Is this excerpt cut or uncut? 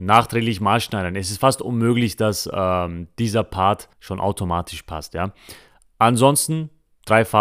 uncut